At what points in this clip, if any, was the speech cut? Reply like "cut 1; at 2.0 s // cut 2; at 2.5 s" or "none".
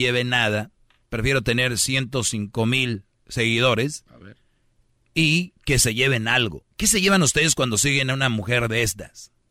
cut 1; at 5.6 s // cut 2; at 6.7 s